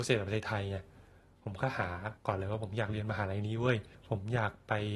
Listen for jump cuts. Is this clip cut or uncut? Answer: cut